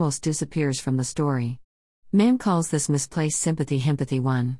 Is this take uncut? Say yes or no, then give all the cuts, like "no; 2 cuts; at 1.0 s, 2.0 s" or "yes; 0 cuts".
yes; 0 cuts